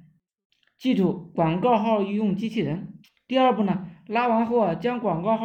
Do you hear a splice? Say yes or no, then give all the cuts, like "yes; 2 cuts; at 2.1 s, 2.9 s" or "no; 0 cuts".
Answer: yes; 1 cut; at 3.0 s